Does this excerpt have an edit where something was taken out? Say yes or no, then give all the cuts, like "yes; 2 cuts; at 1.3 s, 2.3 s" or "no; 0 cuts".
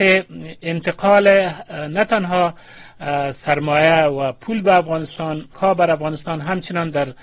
yes; 1 cut; at 5.5 s